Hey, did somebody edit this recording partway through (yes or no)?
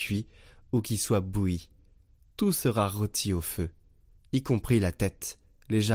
no